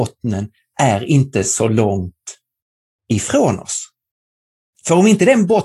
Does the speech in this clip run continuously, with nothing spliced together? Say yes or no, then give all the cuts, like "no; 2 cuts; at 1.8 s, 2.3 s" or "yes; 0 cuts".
yes; 0 cuts